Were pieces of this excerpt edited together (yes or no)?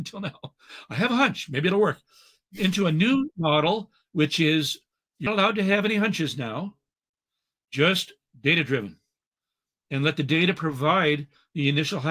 yes